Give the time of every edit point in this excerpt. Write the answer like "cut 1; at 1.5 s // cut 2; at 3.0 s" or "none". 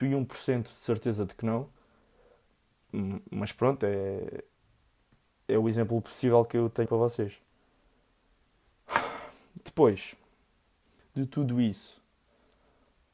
cut 1; at 6.9 s